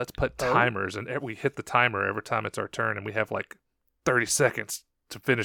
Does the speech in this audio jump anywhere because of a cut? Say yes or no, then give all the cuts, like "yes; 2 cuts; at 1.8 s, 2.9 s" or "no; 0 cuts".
no; 0 cuts